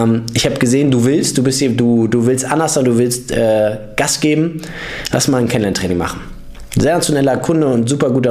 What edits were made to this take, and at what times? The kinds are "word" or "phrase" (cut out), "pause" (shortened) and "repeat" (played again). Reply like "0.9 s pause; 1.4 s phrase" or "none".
none